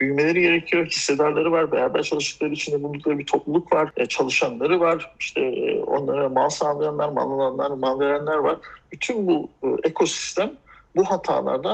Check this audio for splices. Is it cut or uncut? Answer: uncut